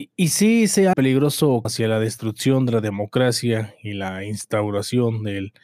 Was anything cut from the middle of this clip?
yes; 2 cuts; at 0.9 s, 1.6 s

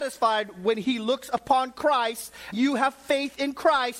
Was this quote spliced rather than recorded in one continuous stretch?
yes; 1 cut; at 2.5 s

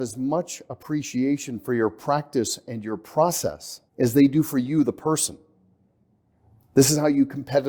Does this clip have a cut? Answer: yes; 1 cut; at 3.9 s

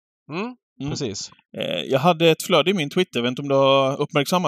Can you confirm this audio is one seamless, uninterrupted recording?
yes; 0 cuts

